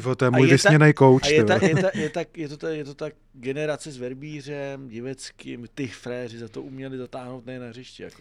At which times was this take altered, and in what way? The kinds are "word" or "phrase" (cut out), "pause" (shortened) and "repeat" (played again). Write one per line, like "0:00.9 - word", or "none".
0:05.7 - phrase